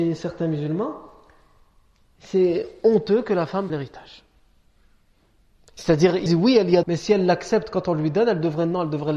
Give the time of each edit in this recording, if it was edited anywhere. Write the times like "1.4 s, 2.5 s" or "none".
3.7 s, 6.3 s, 6.8 s